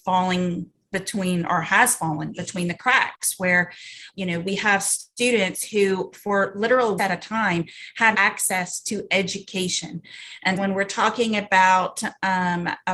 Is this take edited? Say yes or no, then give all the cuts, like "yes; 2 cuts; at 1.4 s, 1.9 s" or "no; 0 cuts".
yes; 4 cuts; at 4.1 s, 7.0 s, 8.1 s, 10.6 s